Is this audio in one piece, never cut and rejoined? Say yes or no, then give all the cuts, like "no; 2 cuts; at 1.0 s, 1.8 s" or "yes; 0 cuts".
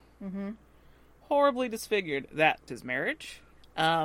no; 1 cut; at 2.7 s